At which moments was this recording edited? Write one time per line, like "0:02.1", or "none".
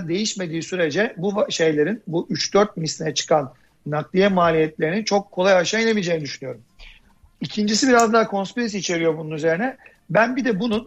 none